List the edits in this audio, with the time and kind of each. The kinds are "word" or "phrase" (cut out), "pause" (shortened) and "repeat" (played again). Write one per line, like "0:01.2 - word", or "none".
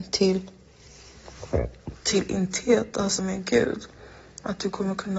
0:03.2 - word